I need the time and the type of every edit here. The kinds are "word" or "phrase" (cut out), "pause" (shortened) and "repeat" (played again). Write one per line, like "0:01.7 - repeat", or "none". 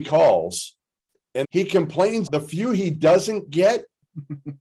0:01.4 - word
0:02.3 - word